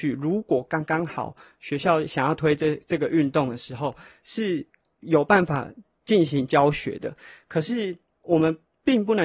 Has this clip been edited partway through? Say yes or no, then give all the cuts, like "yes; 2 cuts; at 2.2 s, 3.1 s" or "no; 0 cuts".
no; 0 cuts